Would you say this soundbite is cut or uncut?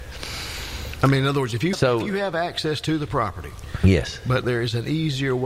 cut